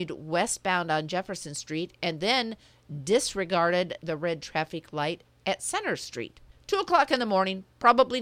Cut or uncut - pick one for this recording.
cut